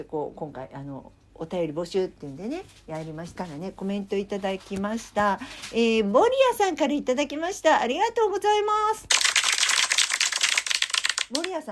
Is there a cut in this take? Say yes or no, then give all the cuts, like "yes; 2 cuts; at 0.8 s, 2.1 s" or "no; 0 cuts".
yes; 1 cut; at 3.4 s